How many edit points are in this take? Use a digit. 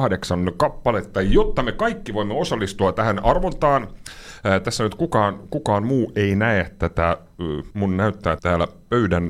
2